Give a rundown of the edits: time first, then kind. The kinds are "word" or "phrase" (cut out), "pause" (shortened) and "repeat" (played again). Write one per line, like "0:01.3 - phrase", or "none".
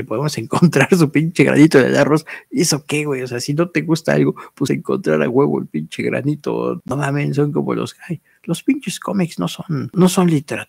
0:04.7 - phrase